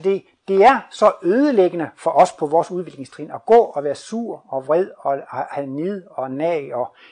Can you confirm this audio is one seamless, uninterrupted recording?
yes; 0 cuts

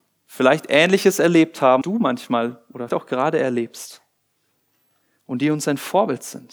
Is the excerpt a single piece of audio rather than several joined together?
no; 2 cuts; at 1.8 s, 2.9 s

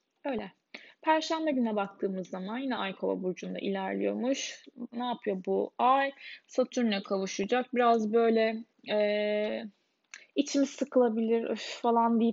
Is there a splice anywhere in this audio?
no; 0 cuts

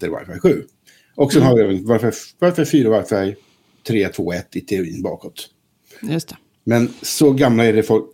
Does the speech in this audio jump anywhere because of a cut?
no; 0 cuts

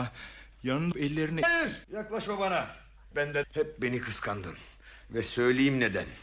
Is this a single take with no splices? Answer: no; 5 cuts; at 0.9 s, 1.4 s, 1.8 s, 3.1 s, 3.4 s

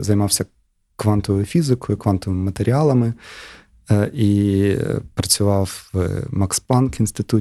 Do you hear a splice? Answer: no; 0 cuts

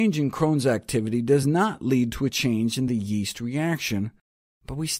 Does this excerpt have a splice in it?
no; 0 cuts

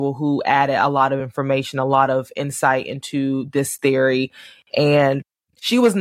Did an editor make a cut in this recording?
no; 0 cuts

